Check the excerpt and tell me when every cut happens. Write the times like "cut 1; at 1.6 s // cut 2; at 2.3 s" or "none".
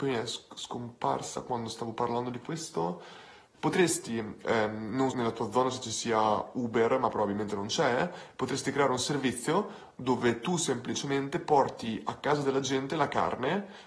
cut 1; at 3.5 s // cut 2; at 5.1 s